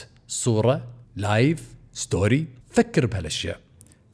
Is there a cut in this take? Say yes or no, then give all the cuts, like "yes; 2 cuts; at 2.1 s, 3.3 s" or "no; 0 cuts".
yes; 2 cuts; at 1.0 s, 2.6 s